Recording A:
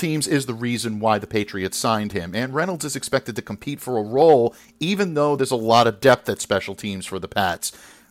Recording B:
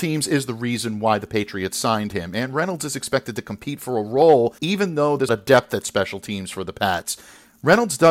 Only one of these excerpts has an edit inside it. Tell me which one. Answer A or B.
B